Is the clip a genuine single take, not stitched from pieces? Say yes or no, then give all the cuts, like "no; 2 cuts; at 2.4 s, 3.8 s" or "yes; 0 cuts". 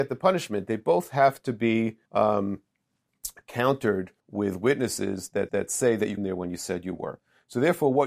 no; 4 cuts; at 2.1 s, 4.2 s, 5.5 s, 6.2 s